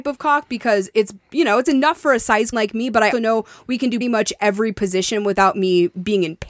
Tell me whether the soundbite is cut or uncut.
cut